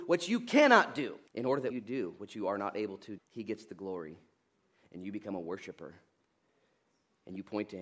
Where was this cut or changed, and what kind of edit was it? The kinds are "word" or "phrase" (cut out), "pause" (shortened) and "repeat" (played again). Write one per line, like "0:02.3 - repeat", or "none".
0:01.3 - pause
0:01.7 - word
0:03.2 - word